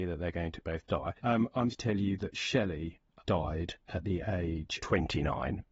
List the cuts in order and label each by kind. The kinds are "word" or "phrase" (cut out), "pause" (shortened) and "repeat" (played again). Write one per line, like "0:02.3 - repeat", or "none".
0:01.2 - pause
0:01.7 - word
0:03.2 - word
0:03.8 - pause
0:04.8 - word